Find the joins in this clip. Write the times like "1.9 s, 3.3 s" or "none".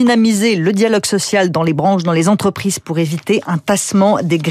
none